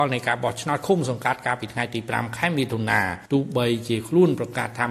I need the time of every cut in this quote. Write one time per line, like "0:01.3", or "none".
0:03.3